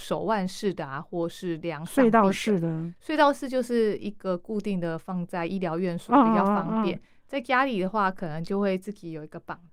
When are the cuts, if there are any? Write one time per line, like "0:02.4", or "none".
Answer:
0:03.0